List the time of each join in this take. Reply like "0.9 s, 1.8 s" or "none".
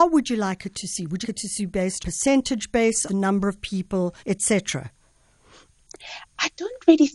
1.2 s, 2.0 s, 3.1 s, 4.2 s